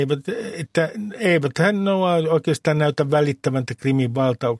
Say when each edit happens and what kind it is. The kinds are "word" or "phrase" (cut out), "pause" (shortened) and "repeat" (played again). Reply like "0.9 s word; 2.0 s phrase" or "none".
3.7 s word